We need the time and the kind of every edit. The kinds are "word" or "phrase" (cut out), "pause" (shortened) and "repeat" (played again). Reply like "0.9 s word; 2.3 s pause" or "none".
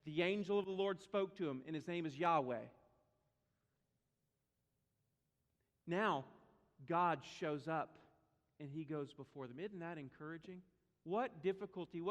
none